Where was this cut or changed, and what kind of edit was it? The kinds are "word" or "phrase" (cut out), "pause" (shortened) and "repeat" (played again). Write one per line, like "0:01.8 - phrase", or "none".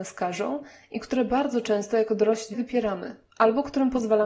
0:02.5 - word